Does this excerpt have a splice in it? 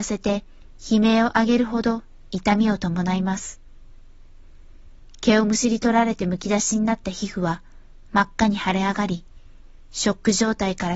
no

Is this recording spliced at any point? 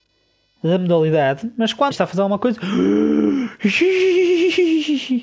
yes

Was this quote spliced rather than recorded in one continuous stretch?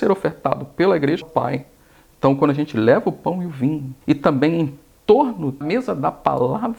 yes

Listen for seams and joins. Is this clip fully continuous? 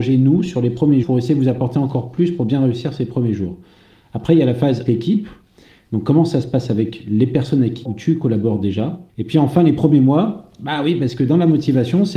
no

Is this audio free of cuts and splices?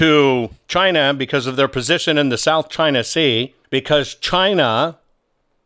no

